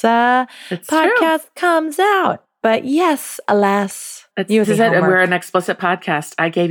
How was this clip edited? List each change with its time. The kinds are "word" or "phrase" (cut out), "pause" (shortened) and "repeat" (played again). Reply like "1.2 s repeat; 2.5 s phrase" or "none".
4.3 s word; 4.6 s word